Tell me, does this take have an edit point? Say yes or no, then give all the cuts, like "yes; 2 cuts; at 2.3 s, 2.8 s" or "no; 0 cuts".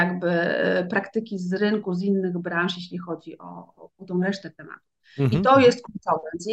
no; 0 cuts